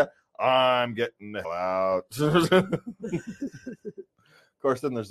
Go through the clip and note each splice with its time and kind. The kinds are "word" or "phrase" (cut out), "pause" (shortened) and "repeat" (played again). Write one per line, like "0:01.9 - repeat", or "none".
0:01.4 - word